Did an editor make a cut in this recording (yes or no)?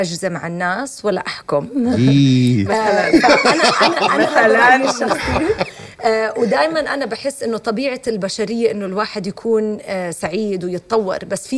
no